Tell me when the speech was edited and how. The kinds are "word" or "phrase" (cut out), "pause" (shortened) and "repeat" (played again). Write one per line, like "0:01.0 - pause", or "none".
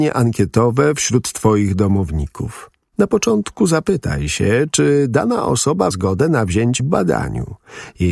0:05.9 - word
0:06.8 - word